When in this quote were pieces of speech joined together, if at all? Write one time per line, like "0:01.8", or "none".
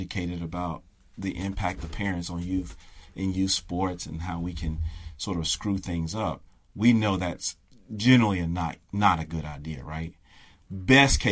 none